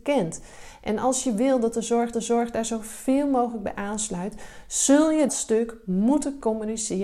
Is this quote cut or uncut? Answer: cut